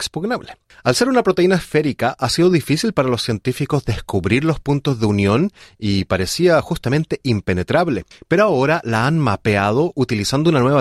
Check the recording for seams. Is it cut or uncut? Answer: uncut